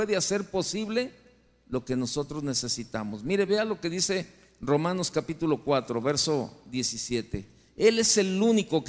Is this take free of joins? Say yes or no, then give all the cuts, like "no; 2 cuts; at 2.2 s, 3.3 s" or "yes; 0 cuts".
yes; 0 cuts